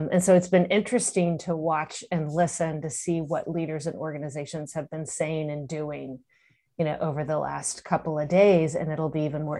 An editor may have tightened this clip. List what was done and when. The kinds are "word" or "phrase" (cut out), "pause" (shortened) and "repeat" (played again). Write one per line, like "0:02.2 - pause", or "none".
none